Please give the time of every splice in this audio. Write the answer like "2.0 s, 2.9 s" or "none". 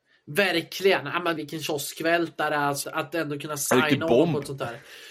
1.4 s, 2.8 s